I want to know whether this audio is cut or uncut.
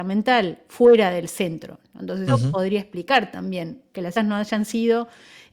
cut